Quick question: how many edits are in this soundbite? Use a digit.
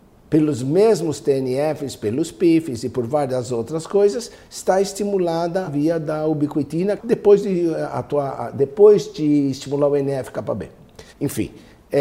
3